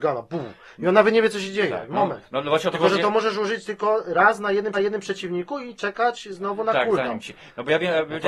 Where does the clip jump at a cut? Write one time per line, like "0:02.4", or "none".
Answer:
0:04.7